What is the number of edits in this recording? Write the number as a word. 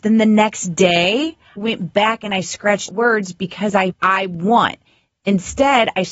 three